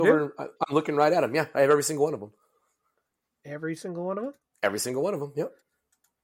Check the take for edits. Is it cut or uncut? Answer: uncut